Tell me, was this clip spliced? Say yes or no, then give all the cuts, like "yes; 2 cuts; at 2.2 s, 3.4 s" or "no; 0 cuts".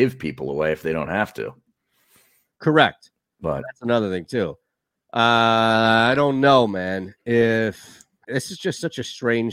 yes; 1 cut; at 8.2 s